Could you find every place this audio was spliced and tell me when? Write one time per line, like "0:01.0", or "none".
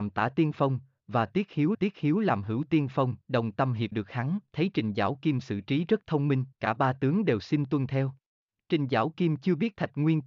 0:01.7
0:03.2
0:03.9
0:06.5
0:08.4

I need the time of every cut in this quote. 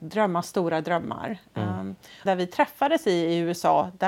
0:02.3

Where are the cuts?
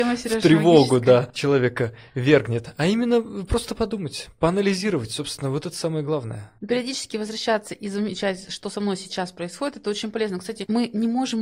none

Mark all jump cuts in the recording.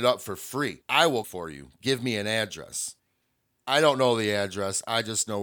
0:01.2

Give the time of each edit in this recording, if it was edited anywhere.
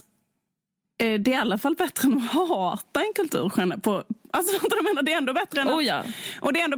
none

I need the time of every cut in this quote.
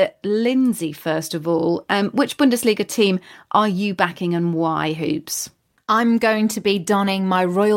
none

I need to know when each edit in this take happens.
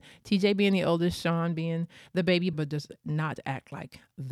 0:02.5

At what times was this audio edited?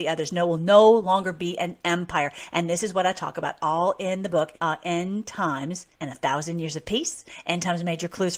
0:04.5
0:05.9

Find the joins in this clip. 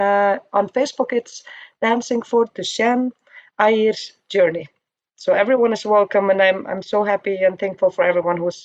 none

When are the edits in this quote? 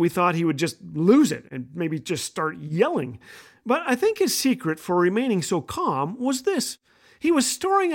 none

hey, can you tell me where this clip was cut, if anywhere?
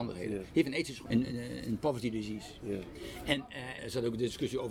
0:01.1
0:03.8

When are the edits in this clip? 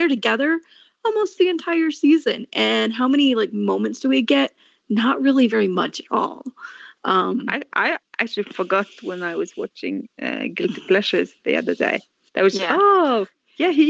none

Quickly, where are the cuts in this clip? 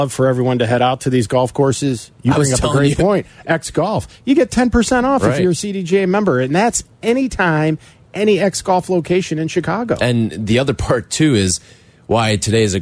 none

